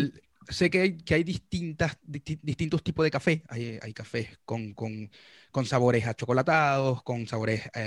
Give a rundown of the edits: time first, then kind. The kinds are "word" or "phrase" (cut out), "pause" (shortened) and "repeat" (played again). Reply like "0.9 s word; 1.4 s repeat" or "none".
none